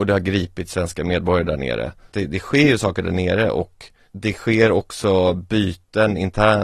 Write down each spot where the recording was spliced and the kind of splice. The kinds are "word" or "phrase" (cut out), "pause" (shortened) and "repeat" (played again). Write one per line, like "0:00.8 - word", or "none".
0:02.1 - phrase